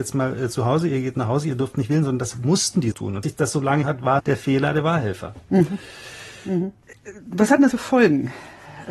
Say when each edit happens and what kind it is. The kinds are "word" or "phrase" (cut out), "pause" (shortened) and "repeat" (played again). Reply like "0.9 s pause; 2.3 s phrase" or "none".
2.9 s word; 3.2 s word; 3.8 s word; 4.2 s word; 7.7 s word